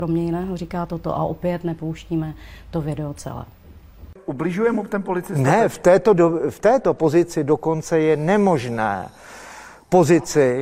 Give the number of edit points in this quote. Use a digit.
0